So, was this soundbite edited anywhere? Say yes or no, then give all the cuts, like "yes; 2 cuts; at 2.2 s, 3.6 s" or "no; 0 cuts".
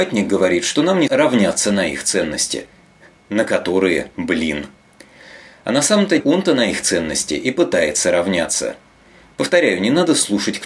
yes; 2 cuts; at 1.1 s, 6.2 s